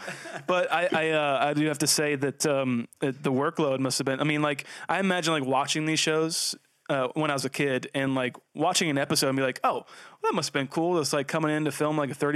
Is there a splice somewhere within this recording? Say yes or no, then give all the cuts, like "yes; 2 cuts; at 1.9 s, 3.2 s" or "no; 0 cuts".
no; 0 cuts